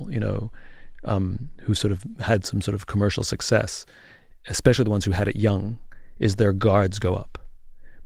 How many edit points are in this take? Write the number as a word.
zero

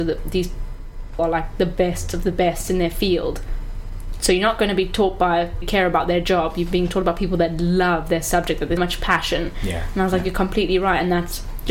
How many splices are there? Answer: three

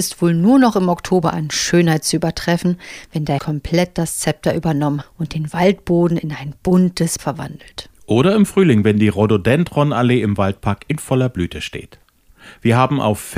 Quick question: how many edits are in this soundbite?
three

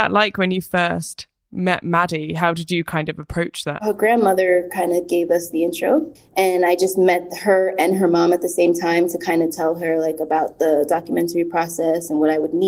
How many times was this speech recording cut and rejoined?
one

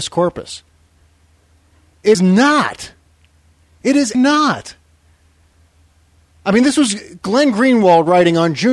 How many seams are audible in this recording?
two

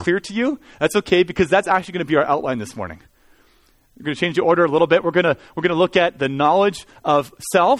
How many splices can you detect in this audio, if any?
zero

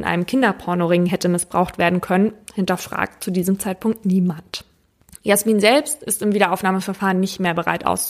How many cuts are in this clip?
zero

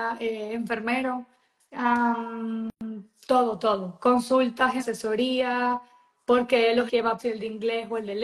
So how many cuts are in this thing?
four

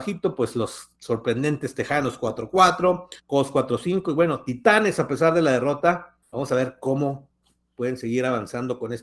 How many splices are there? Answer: three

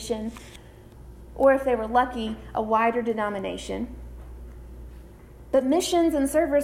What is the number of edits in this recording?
zero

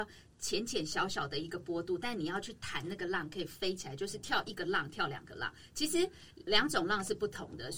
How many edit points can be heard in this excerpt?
one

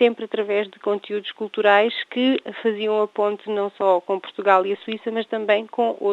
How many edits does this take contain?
zero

